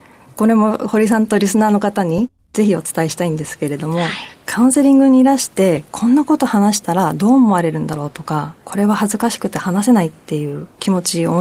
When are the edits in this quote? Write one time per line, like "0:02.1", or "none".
0:08.6